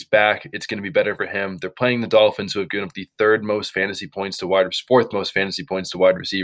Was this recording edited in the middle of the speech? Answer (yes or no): no